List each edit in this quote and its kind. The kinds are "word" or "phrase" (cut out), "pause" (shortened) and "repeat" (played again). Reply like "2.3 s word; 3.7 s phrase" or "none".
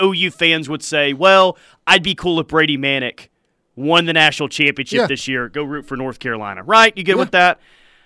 none